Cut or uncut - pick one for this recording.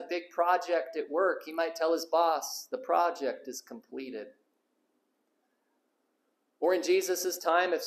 uncut